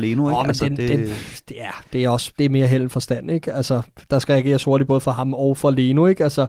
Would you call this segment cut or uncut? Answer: uncut